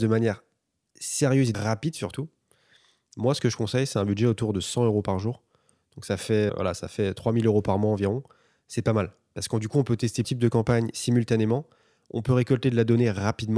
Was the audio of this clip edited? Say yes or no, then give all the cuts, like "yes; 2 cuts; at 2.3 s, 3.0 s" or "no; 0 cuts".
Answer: yes; 3 cuts; at 1.5 s, 6.5 s, 10.2 s